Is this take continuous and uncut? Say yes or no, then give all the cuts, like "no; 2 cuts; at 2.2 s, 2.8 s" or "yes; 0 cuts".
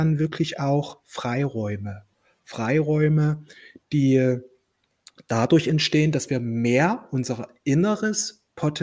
yes; 0 cuts